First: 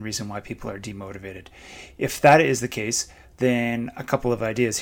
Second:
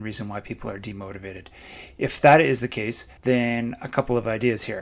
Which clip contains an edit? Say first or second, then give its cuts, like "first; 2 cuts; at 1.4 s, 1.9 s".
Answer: second; 1 cut; at 3.2 s